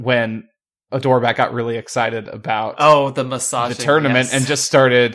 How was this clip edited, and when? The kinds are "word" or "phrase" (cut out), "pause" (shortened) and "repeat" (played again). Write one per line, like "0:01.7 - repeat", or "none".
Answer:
none